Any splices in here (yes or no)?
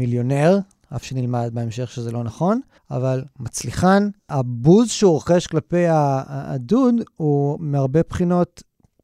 yes